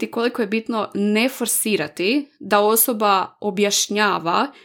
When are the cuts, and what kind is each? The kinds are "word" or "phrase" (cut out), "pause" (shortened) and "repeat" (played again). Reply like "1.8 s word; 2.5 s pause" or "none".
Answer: none